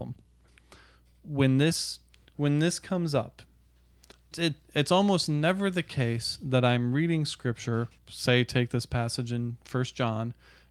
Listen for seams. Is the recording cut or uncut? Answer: cut